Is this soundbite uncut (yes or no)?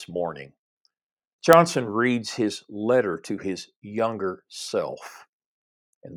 yes